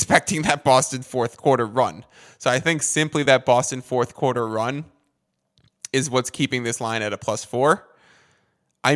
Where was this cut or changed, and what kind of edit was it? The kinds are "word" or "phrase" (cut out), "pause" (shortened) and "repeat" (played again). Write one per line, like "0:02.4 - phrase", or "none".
none